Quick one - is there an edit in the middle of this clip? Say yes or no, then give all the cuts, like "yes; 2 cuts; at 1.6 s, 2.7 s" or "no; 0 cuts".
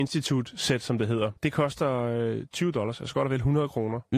yes; 1 cut; at 1.4 s